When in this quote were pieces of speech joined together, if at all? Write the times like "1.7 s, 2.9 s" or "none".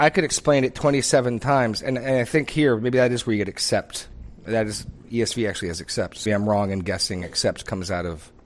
6.3 s